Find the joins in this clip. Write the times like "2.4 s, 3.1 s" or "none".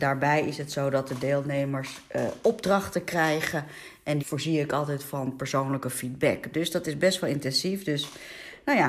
4.2 s